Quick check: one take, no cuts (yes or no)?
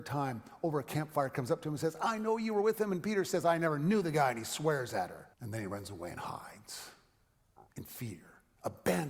no